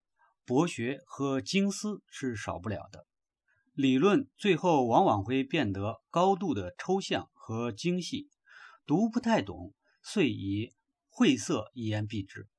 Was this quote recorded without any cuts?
yes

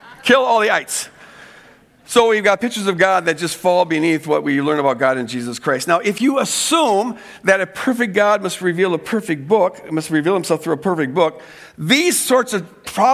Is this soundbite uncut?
yes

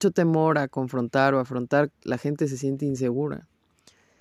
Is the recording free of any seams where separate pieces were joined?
no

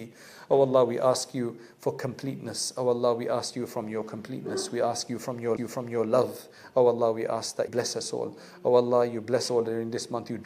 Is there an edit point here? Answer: yes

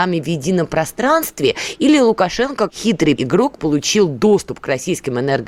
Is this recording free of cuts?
no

